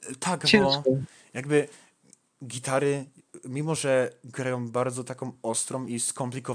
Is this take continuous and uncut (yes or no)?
yes